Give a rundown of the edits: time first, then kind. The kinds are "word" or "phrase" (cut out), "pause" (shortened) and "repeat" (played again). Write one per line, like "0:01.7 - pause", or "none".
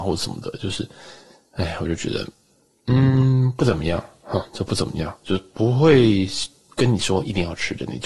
none